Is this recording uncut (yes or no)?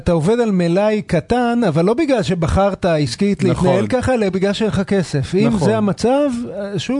yes